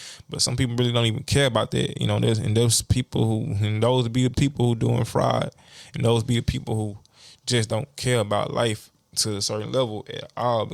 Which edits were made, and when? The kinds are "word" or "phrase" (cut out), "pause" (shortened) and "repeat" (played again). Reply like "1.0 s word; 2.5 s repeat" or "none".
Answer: none